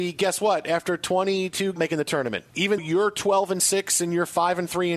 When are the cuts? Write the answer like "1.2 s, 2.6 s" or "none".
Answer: 1.8 s, 2.8 s